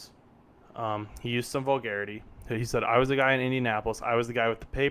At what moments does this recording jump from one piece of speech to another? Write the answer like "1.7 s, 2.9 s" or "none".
none